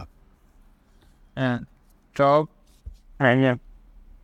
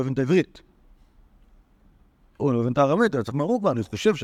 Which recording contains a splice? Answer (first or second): second